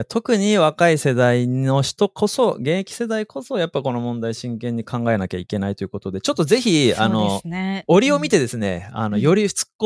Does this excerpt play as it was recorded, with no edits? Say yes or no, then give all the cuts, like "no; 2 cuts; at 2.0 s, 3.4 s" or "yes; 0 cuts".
yes; 0 cuts